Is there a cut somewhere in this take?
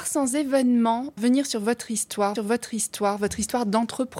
yes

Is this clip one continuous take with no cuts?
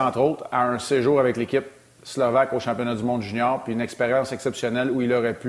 yes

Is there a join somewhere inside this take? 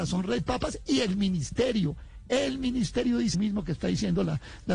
yes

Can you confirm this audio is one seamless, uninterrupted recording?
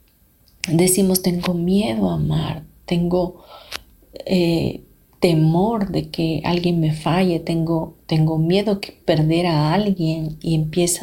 yes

